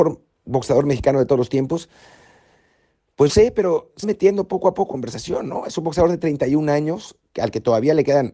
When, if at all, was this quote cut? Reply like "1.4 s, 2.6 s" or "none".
3.3 s, 4.0 s, 4.9 s